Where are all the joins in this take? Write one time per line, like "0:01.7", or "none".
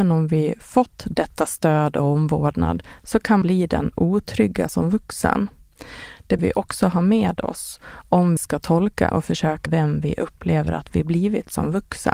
0:03.4
0:04.7
0:06.4
0:08.4
0:09.1
0:09.7